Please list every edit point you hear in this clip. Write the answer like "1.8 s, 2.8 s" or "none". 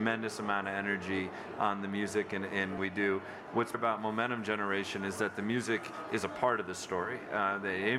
2.8 s, 3.7 s